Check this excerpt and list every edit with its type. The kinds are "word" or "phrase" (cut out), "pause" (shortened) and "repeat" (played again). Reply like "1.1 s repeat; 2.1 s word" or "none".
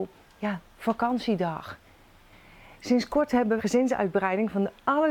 3.6 s word